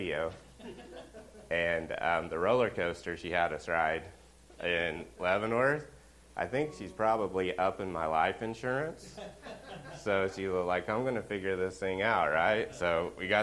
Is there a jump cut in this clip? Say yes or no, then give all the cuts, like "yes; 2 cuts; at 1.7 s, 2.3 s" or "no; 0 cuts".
no; 0 cuts